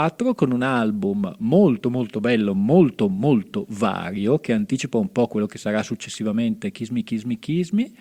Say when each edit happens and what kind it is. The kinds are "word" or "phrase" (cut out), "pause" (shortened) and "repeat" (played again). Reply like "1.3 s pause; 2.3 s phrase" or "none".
none